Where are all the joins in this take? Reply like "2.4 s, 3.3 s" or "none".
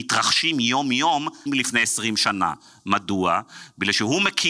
1.5 s